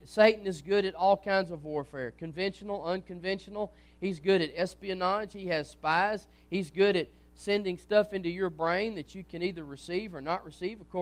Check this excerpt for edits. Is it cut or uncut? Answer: uncut